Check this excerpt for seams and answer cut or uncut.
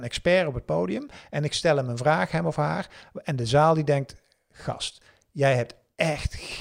uncut